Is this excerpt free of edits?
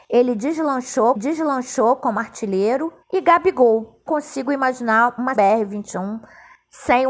no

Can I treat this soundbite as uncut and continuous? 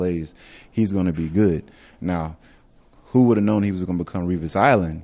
yes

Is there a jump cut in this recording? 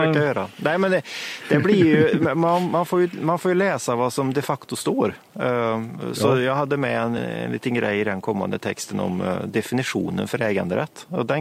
yes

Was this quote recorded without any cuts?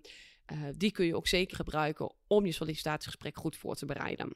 no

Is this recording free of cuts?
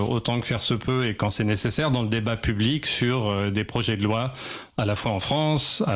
yes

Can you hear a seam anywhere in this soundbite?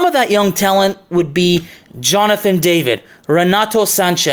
no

